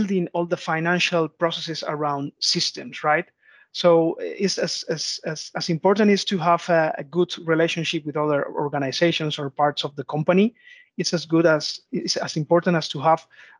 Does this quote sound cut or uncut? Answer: uncut